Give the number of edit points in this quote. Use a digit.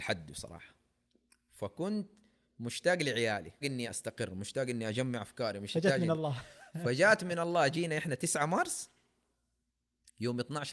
1